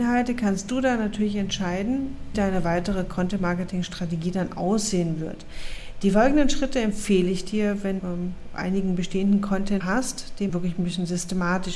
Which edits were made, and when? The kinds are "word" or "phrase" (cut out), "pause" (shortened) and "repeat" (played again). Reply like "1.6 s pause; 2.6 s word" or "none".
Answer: 2.3 s word; 8.0 s word; 8.5 s word; 9.8 s word; 10.5 s word